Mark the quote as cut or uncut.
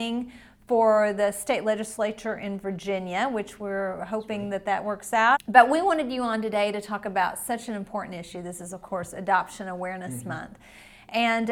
uncut